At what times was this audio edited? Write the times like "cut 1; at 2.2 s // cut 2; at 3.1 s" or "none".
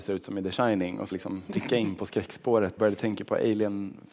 cut 1; at 1.1 s // cut 2; at 1.5 s // cut 3; at 2.8 s